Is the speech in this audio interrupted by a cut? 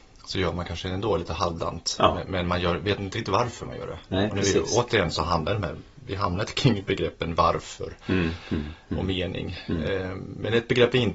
no; 0 cuts

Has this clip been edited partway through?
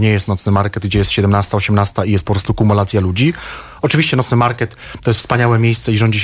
no; 0 cuts

